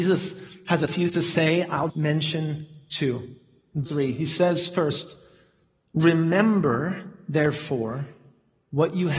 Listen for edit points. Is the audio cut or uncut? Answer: cut